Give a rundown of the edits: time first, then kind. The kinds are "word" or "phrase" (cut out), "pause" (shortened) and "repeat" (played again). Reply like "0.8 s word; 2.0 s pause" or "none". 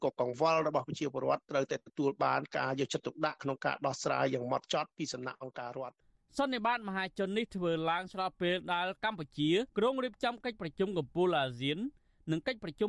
9.7 s pause